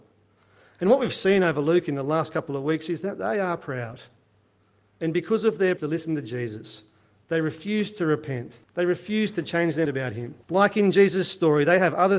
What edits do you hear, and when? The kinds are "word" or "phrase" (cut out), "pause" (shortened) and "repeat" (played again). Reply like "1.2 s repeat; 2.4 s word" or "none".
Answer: 5.8 s phrase; 8.6 s pause; 9.9 s word; 10.4 s pause